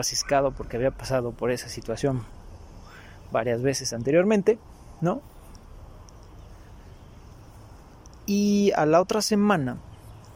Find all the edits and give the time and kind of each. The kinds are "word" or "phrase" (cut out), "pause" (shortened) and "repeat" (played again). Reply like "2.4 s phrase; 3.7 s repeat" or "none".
none